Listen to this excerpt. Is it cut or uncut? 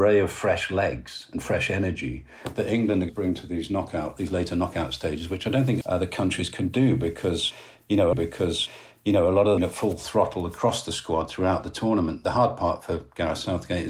cut